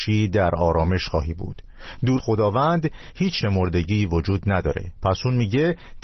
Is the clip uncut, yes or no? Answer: no